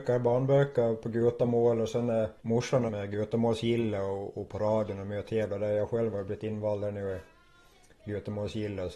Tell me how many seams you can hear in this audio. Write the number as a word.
two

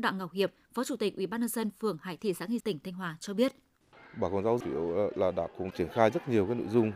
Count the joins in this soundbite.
four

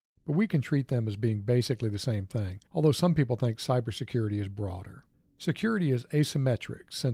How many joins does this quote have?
one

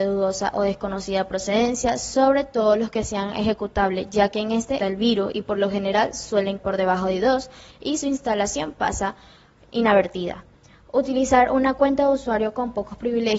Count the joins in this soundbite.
two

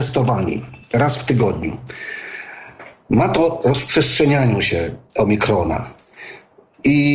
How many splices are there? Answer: one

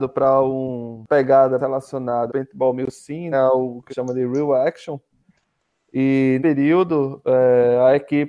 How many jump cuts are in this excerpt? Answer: six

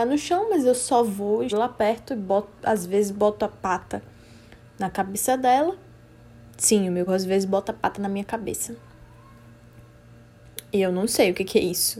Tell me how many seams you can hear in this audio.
two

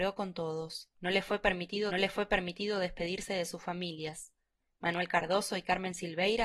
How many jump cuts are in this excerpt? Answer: two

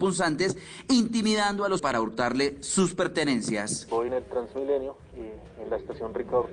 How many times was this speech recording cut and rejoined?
two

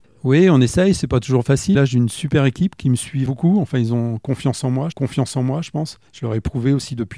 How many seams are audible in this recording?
four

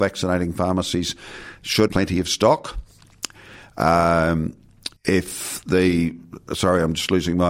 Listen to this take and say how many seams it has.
two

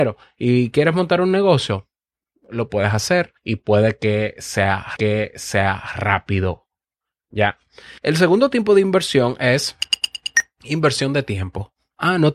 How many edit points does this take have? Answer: three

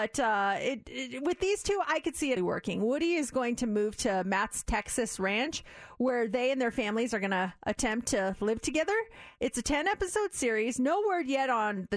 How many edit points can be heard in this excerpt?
one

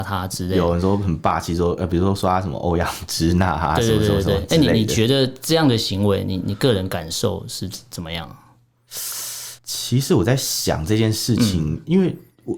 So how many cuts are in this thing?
one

